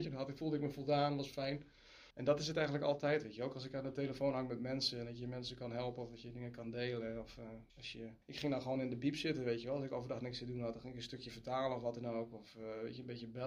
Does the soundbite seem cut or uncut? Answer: cut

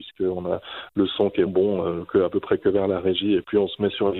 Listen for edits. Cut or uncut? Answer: cut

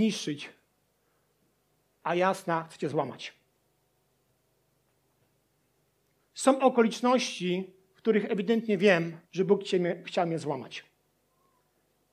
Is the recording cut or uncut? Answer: cut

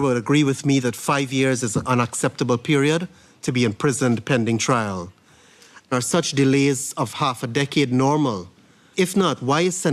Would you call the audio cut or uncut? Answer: cut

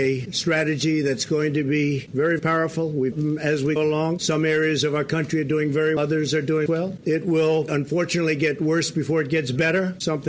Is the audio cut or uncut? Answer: cut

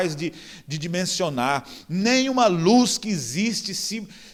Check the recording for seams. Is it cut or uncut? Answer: uncut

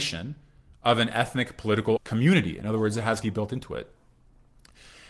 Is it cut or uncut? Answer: cut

